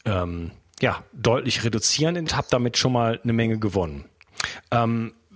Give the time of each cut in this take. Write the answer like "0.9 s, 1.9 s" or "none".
2.3 s